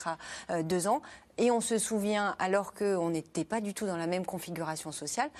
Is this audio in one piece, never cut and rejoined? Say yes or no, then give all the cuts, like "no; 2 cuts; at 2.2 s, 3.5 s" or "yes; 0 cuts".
yes; 0 cuts